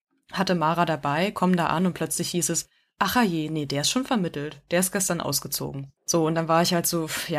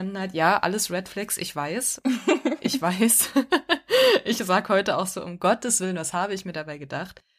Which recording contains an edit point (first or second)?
first